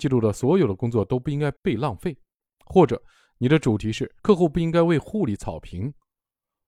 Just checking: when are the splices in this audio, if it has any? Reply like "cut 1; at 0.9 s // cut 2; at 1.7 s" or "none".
cut 1; at 1.6 s // cut 2; at 4.2 s